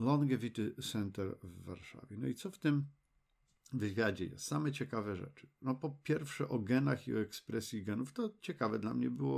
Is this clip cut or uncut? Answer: uncut